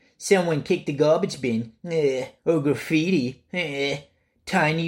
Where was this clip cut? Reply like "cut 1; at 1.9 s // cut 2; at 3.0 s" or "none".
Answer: cut 1; at 2.4 s